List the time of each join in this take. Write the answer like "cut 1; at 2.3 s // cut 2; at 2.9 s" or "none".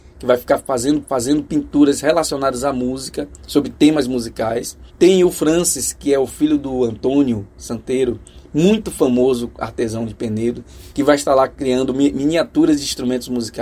cut 1; at 1.0 s // cut 2; at 4.9 s